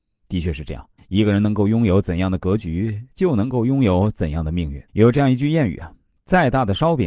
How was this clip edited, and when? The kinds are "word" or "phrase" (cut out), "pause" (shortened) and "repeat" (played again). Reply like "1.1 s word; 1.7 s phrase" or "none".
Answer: 1.0 s pause; 4.9 s pause